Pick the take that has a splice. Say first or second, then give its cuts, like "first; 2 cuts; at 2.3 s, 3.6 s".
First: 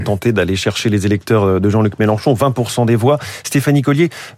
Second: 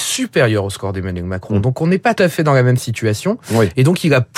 second; 1 cut; at 2.2 s